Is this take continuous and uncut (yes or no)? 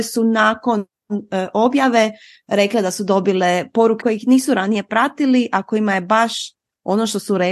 no